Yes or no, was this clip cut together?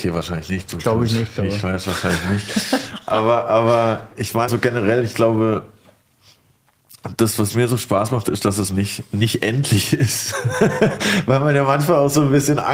yes